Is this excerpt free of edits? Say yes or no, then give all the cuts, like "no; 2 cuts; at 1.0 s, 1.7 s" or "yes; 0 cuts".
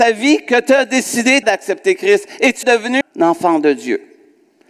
no; 3 cuts; at 1.4 s, 2.6 s, 3.0 s